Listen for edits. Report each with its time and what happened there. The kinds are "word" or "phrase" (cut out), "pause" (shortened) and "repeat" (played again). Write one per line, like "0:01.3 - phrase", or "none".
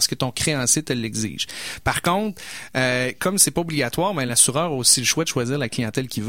none